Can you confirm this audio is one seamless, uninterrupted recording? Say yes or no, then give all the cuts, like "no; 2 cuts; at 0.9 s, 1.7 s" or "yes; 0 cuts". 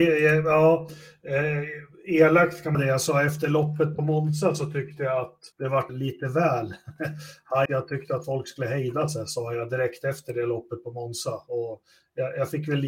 no; 4 cuts; at 2.7 s, 5.5 s, 5.9 s, 7.7 s